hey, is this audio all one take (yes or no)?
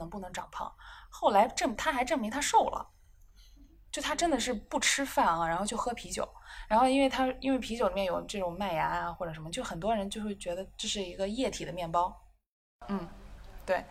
yes